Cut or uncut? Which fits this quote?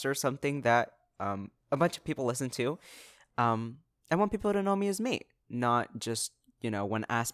uncut